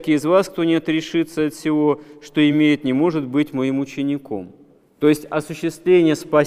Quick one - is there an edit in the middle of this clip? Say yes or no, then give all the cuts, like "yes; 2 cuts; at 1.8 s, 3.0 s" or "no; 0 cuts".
no; 0 cuts